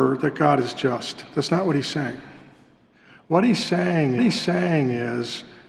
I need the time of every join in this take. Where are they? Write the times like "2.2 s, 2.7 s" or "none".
4.2 s